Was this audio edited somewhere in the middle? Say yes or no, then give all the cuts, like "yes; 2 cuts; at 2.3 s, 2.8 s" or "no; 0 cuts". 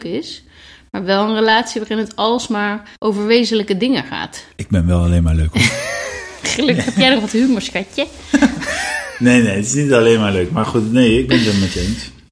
yes; 2 cuts; at 3.0 s, 4.5 s